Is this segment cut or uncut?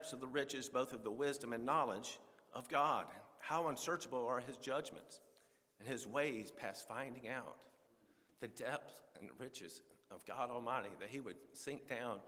uncut